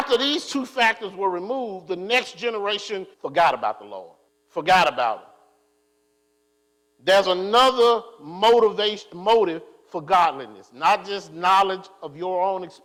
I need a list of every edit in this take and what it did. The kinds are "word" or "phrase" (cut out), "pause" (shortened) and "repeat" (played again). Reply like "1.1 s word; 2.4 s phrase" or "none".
3.1 s pause; 4.3 s pause